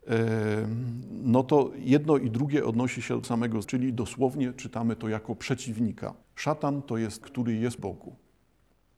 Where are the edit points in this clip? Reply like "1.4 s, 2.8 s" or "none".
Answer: 3.2 s, 3.6 s, 6.2 s, 7.2 s, 7.8 s